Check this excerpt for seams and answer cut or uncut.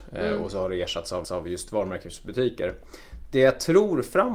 cut